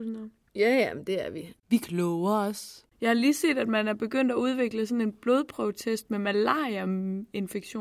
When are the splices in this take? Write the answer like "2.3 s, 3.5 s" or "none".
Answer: 1.6 s, 2.9 s